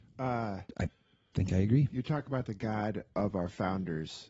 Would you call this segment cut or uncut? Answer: uncut